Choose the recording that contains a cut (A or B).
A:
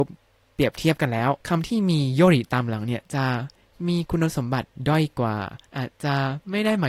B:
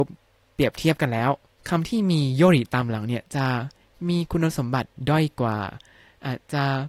A